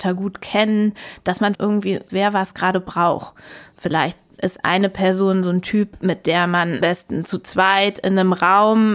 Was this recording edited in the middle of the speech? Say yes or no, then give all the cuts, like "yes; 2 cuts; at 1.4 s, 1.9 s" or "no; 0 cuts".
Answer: yes; 3 cuts; at 1.5 s, 2.1 s, 6.8 s